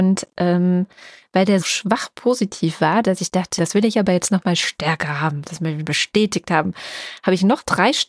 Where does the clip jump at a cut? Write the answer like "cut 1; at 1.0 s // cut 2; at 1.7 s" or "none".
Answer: cut 1; at 1.6 s // cut 2; at 3.6 s // cut 3; at 5.8 s